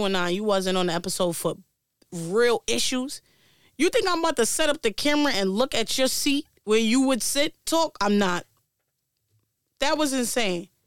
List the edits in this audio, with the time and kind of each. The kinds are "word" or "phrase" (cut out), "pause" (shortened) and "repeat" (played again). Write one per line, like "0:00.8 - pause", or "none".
0:07.6 - word